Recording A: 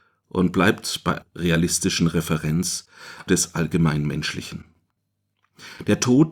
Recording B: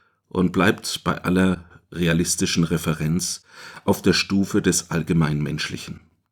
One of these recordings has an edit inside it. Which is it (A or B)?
A